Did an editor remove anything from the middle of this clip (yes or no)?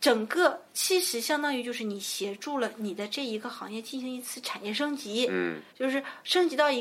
yes